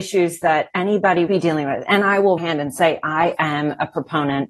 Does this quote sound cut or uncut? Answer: cut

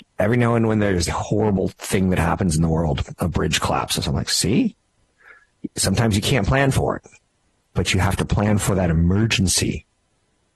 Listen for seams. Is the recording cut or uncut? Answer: cut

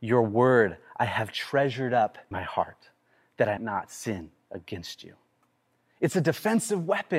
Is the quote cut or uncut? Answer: cut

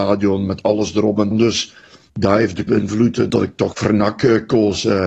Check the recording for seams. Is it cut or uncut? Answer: cut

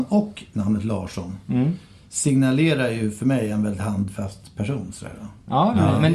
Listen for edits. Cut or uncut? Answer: uncut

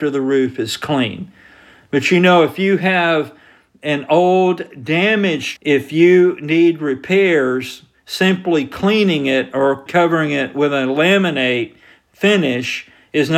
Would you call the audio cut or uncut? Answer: cut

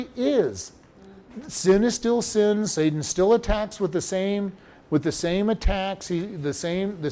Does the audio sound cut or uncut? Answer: uncut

